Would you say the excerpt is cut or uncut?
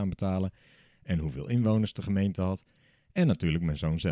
uncut